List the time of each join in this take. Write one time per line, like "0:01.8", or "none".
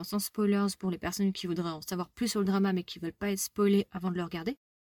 none